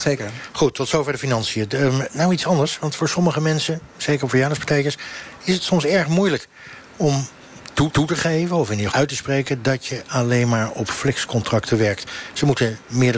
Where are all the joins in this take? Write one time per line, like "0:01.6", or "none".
0:02.1
0:07.9
0:08.9

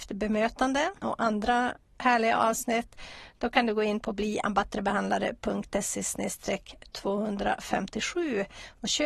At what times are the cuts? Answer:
0:01.0

